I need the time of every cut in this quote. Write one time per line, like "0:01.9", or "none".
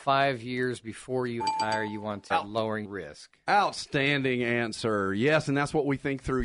0:01.4
0:02.3
0:02.8

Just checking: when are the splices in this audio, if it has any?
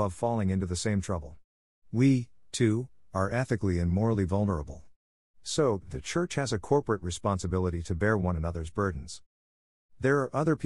none

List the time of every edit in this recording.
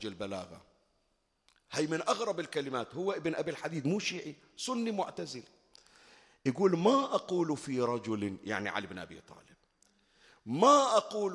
none

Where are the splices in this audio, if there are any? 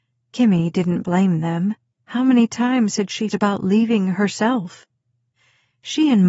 0:03.3

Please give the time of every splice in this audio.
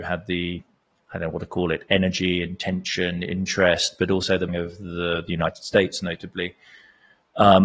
0:04.5

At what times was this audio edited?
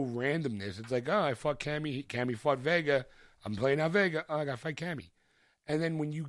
none

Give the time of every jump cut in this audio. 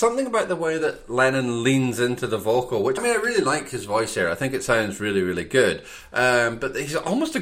0:03.0

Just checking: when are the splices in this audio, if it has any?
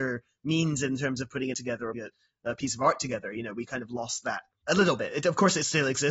0:01.5
0:01.9

